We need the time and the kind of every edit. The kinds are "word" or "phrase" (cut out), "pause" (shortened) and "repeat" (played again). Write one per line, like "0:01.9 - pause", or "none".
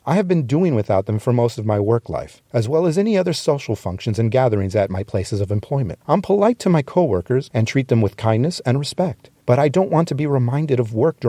0:02.5 - pause
0:06.0 - pause
0:09.4 - pause